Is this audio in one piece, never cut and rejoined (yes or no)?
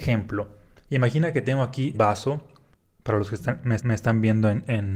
no